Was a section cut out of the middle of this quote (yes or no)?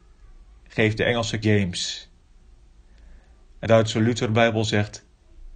yes